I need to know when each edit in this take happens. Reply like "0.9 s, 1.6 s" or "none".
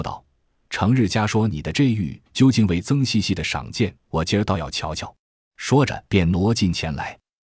2.3 s, 4.0 s, 5.2 s, 6.1 s

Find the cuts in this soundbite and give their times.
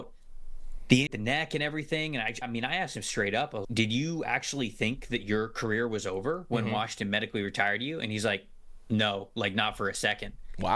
1.1 s, 2.4 s, 3.6 s

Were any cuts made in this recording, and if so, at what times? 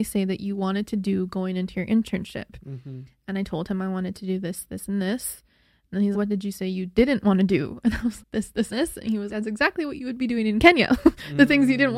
6.1 s, 8.2 s, 8.7 s, 9.3 s

